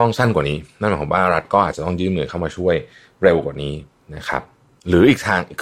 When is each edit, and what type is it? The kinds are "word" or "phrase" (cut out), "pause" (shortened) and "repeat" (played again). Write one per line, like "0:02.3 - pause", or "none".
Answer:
none